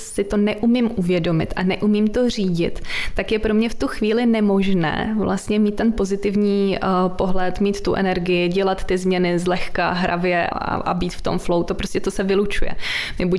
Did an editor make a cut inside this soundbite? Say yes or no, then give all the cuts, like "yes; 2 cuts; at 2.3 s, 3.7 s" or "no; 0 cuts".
yes; 1 cut; at 10.5 s